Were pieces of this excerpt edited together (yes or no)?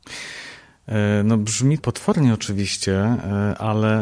yes